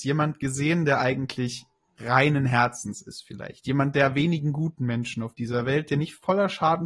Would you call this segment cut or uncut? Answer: uncut